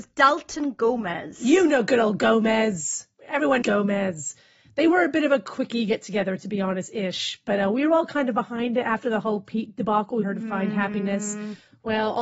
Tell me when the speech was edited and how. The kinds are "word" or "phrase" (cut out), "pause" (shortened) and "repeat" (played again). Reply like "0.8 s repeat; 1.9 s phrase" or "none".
3.6 s word; 10.2 s word